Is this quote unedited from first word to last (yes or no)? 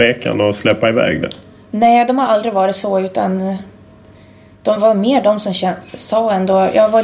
yes